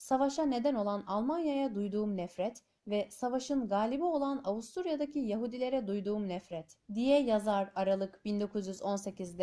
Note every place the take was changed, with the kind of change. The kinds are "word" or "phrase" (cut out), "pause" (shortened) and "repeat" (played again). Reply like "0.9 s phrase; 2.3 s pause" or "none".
6.8 s pause